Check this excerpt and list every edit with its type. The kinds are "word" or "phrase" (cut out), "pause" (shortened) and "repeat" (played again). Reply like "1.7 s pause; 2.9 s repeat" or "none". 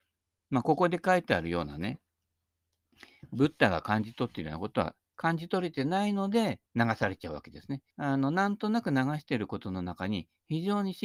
6.7 s pause; 7.9 s pause